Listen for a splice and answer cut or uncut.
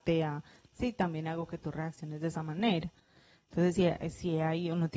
uncut